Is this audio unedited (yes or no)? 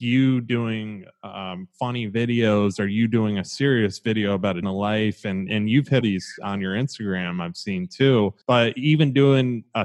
no